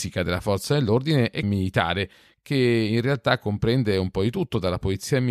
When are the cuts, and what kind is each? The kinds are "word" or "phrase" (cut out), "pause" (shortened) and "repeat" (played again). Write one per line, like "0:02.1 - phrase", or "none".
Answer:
0:01.4 - word